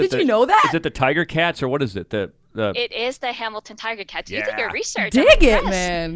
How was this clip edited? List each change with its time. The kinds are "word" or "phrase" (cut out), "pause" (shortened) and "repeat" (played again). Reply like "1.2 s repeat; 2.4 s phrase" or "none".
none